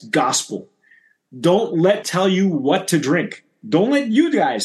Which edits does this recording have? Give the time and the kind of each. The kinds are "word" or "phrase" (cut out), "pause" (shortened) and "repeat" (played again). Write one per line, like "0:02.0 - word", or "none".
0:02.0 - word